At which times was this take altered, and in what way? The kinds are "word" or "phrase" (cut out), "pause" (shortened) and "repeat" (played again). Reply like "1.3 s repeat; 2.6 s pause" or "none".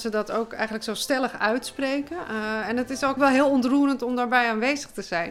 3.2 s word